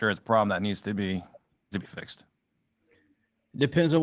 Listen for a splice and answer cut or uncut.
cut